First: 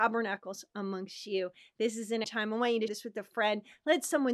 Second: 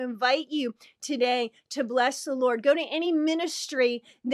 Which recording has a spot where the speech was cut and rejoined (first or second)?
first